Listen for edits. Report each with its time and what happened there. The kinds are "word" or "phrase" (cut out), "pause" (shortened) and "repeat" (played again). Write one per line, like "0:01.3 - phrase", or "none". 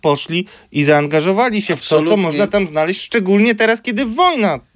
none